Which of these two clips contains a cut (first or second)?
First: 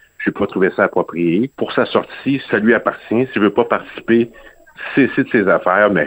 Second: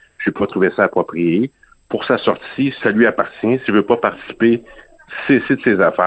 first